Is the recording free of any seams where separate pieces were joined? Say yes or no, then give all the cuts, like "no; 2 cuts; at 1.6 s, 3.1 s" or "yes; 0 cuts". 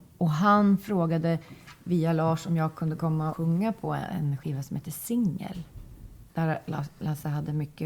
no; 2 cuts; at 3.3 s, 6.3 s